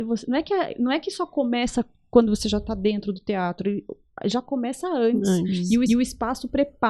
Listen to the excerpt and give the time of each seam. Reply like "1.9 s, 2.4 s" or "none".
5.9 s